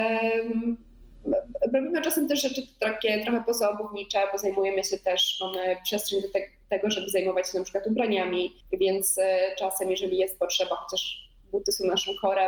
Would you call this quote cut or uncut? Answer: cut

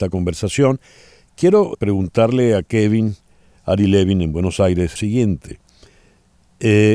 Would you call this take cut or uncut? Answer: cut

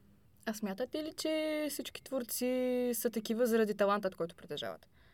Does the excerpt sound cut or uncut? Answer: uncut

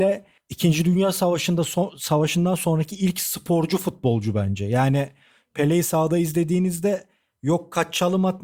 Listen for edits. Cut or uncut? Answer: uncut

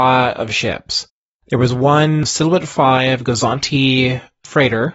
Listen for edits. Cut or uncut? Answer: uncut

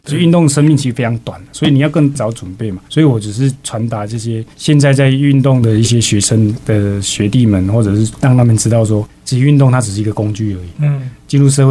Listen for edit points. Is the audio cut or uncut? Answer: cut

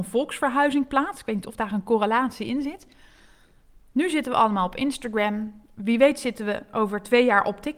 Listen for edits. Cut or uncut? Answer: uncut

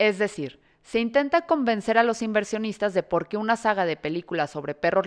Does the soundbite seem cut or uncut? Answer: uncut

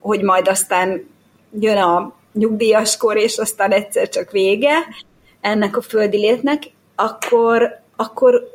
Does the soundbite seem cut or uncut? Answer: uncut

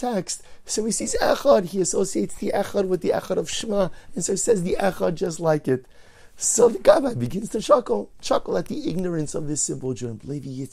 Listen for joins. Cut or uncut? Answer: uncut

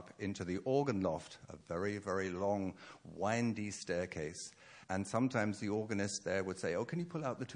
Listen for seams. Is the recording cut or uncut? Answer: cut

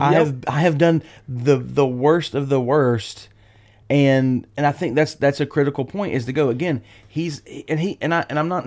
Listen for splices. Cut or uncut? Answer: uncut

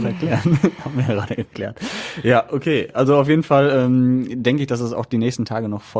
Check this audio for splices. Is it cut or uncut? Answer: uncut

